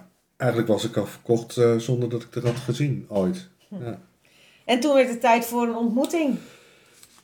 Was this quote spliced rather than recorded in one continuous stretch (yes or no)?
no